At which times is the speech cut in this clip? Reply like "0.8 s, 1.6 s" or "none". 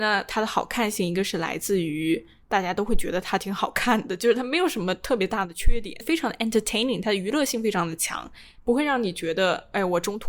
none